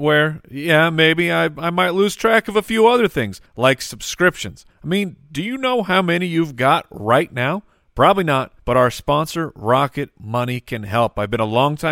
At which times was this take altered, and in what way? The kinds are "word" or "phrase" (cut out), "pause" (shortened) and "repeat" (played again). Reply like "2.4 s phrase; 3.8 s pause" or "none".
3.5 s pause; 4.7 s pause; 8.6 s pause